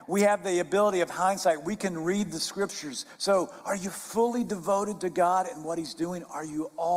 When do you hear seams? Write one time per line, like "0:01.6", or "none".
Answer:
none